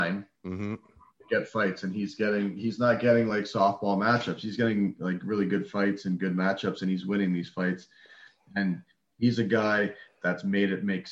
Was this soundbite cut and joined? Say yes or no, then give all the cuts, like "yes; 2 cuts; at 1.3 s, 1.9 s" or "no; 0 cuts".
no; 0 cuts